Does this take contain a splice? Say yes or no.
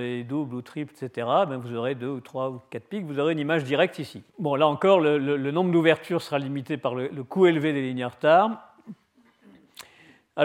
yes